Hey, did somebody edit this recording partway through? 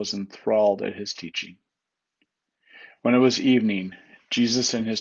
no; 0 cuts

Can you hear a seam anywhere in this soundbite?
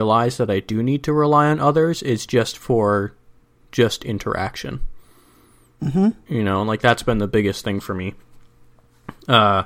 no; 0 cuts

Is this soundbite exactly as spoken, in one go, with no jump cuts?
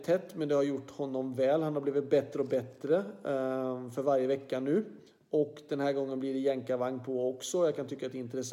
yes; 0 cuts

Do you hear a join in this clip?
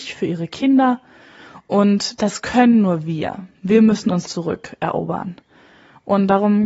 yes; 2 cuts; at 3.5 s, 4.3 s

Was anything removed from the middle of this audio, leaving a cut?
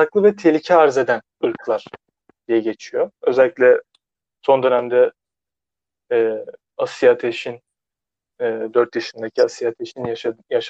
no; 0 cuts

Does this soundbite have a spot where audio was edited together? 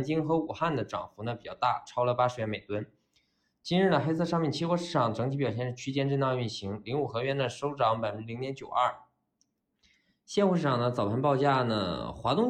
no; 0 cuts

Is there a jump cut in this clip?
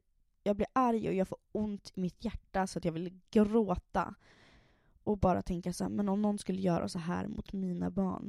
no; 0 cuts

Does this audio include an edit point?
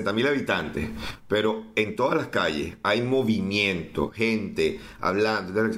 no; 0 cuts

